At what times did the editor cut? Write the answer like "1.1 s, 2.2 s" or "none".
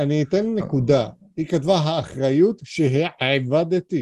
none